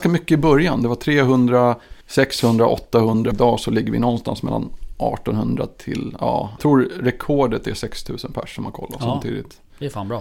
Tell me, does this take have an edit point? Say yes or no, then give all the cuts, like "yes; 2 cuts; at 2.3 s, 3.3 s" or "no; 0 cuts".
yes; 3 cuts; at 2.0 s, 3.3 s, 6.6 s